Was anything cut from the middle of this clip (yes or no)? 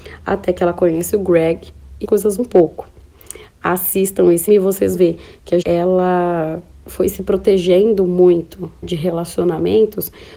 yes